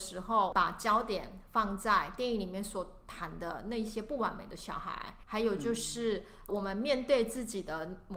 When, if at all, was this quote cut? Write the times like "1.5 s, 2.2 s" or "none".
5.2 s, 6.5 s